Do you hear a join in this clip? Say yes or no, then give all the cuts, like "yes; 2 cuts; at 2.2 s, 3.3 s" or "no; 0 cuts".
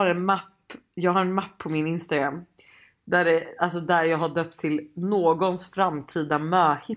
no; 0 cuts